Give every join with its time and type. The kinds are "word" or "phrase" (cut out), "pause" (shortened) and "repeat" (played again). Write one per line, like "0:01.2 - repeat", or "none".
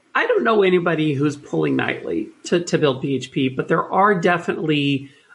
none